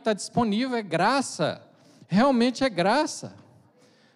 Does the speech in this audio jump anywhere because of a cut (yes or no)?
no